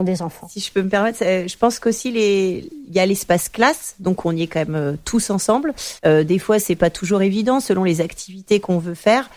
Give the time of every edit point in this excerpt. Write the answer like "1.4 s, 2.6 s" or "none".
6.0 s